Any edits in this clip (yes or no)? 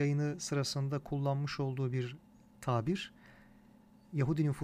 no